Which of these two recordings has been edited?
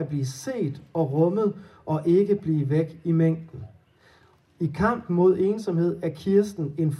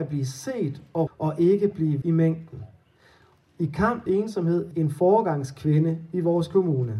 second; 4 cuts; at 1.1 s, 2.0 s, 4.1 s, 4.7 s

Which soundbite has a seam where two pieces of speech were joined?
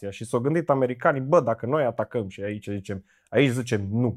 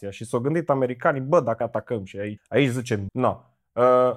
second; 3 cuts; at 1.6 s, 2.4 s, 3.1 s

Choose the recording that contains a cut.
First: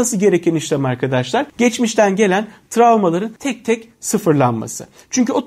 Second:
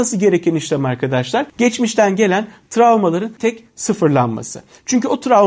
second; 1 cut; at 3.4 s

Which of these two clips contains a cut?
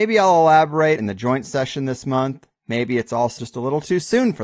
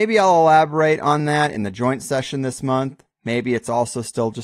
first; 2 cuts; at 1.0 s, 3.4 s

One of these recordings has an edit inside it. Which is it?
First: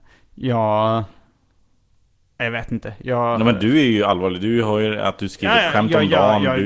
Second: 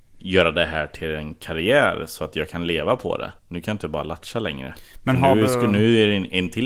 second; 1 cut; at 3.4 s

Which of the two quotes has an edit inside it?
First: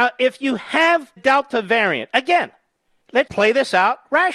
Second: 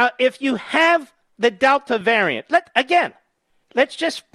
first; 3 cuts; at 1.2 s, 2.1 s, 3.3 s

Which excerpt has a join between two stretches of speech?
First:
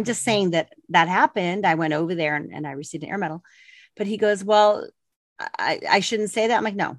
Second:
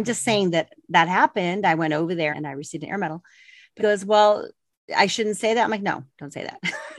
second; 3 cuts; at 2.3 s, 3.8 s, 4.9 s

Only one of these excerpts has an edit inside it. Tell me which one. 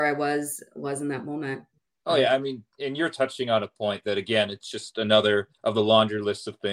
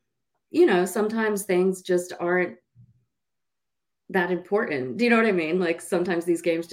first; 2 cuts; at 1.8 s, 5.6 s

